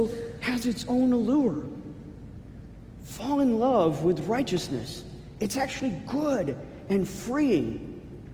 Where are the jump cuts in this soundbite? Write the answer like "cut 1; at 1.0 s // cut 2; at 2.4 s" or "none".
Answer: none